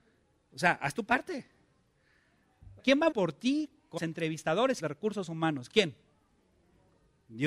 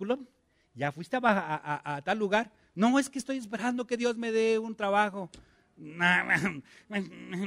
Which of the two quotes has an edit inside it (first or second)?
first